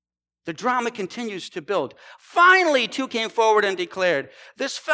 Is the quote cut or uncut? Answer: uncut